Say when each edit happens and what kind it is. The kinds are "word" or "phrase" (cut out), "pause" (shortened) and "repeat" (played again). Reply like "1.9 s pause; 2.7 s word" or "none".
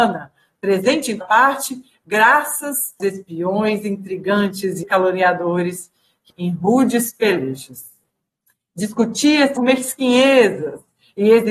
1.2 s word; 3.0 s word; 4.8 s word; 6.3 s word; 9.6 s word